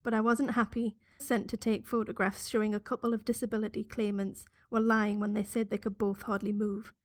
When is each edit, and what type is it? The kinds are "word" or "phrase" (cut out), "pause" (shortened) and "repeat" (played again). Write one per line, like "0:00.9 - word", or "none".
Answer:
0:01.2 - phrase